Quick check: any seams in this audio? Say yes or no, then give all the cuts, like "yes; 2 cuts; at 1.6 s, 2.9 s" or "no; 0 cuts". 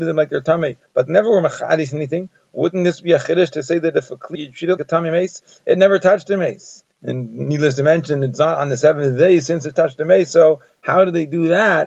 yes; 3 cuts; at 4.3 s, 4.8 s, 6.9 s